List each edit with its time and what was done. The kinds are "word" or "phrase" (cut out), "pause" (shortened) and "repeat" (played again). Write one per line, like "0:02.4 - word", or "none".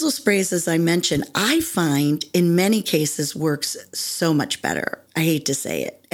none